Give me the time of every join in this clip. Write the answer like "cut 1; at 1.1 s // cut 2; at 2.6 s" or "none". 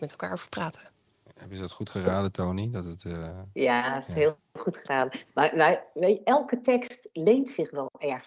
none